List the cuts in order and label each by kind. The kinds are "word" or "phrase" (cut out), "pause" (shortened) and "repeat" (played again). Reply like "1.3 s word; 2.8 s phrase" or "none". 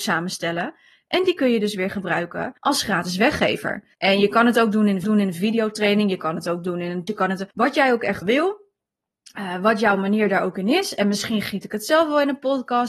2.6 s pause; 3.9 s pause; 5.0 s repeat; 7.1 s word; 7.5 s pause; 8.2 s word